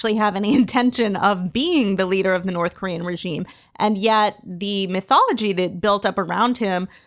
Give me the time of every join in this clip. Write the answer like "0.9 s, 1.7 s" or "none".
none